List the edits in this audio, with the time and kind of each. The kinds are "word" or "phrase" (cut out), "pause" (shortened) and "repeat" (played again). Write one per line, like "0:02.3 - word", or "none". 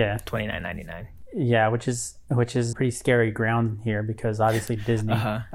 0:02.7 - word